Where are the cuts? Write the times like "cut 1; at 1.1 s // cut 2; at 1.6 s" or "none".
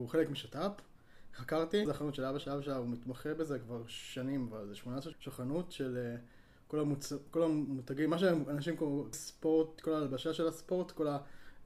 cut 1; at 1.9 s // cut 2; at 2.4 s // cut 3; at 5.1 s // cut 4; at 9.1 s